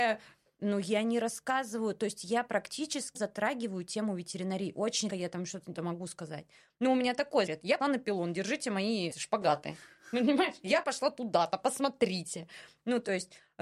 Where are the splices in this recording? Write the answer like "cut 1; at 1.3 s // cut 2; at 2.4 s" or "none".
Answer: cut 1; at 3.1 s // cut 2; at 5.1 s // cut 3; at 5.7 s // cut 4; at 7.5 s // cut 5; at 7.8 s // cut 6; at 9.1 s